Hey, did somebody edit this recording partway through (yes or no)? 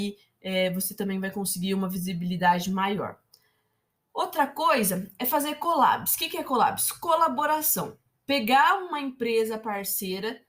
no